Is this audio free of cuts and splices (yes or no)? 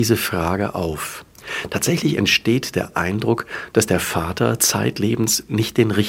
yes